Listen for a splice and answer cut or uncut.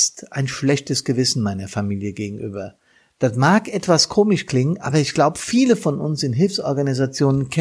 uncut